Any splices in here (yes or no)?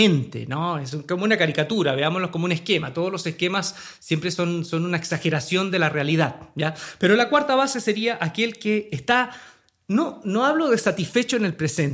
no